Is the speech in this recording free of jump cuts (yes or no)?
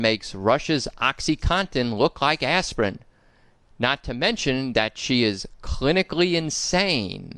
yes